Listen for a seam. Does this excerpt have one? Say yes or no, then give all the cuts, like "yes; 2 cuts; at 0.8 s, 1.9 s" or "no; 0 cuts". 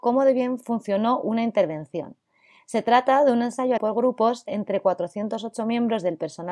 yes; 1 cut; at 3.8 s